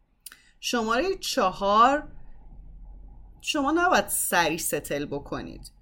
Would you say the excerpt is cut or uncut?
uncut